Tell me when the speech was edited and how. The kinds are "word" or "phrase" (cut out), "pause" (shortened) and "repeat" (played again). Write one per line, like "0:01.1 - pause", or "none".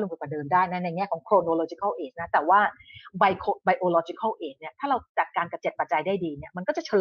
none

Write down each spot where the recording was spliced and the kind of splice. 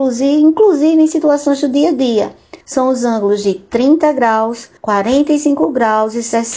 0:02.6 - pause
0:04.8 - pause

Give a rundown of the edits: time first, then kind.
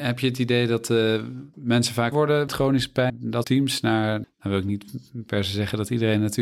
0:01.5 - word
0:02.1 - word
0:02.5 - word
0:03.1 - word
0:03.4 - word
0:04.2 - word

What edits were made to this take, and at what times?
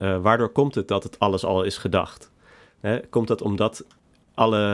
none

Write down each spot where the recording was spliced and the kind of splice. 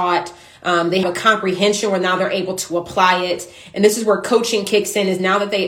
0:01.0 - word

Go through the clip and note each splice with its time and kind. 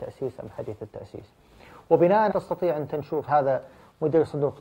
0:02.3 - word
0:03.3 - word

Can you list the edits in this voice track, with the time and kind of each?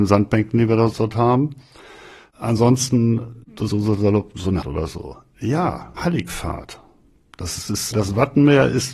0:00.9 - word
0:03.7 - word
0:04.6 - word
0:06.0 - word
0:07.7 - word

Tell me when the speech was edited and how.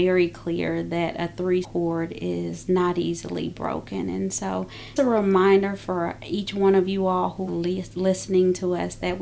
0:01.6 - word
0:05.0 - word
0:07.5 - word

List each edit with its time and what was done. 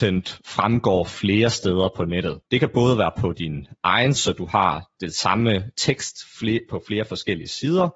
0:02.4 - pause
0:04.1 - word

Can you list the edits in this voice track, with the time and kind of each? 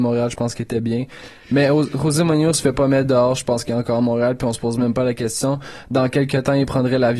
none

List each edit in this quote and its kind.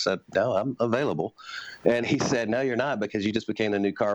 0:02.0 - word

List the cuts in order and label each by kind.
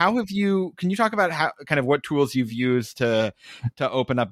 none

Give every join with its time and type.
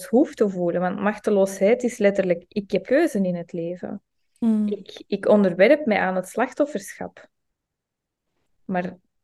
0:02.8 - word

